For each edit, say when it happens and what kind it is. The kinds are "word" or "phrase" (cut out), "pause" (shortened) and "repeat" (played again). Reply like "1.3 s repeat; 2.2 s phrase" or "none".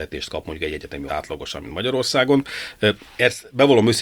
1.1 s word